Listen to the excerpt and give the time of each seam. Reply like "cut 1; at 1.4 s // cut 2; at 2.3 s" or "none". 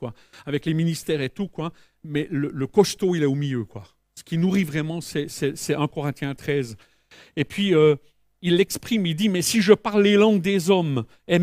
none